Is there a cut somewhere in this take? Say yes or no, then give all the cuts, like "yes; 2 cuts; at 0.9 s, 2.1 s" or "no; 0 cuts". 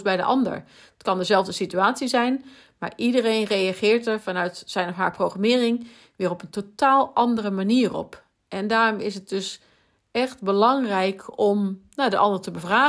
no; 0 cuts